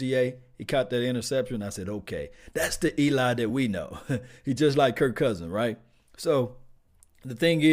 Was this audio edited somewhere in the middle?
no; 0 cuts

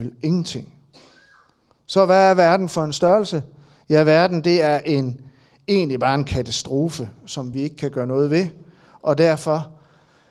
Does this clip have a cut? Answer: no; 0 cuts

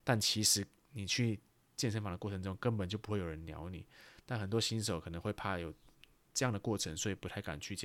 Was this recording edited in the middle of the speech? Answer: no; 0 cuts

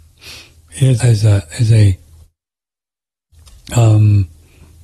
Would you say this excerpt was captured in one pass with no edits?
no; 1 cut; at 1.0 s

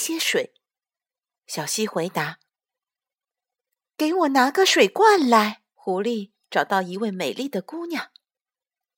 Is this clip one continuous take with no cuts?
no; 1 cut; at 5.7 s

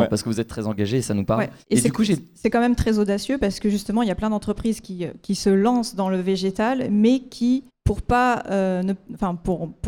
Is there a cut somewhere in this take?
yes; 2 cuts; at 1.6 s, 7.7 s

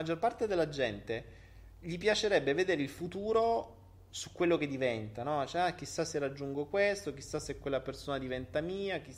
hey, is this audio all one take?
yes; 0 cuts

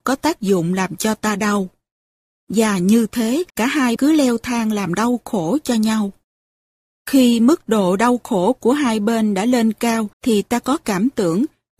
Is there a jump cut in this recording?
yes; 3 cuts; at 3.5 s, 4.0 s, 10.1 s

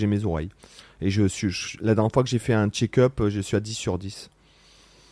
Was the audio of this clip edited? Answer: no; 0 cuts

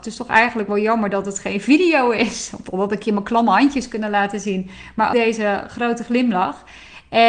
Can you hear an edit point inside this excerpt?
yes; 1 cut; at 5.1 s

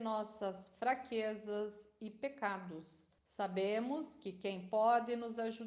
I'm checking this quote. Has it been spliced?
yes; 1 cut; at 3.2 s

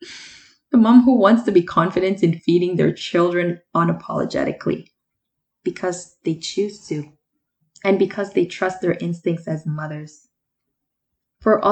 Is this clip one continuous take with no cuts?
yes; 0 cuts

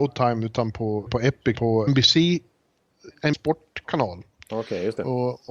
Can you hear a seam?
yes; 4 cuts; at 1.1 s, 1.6 s, 1.9 s, 3.3 s

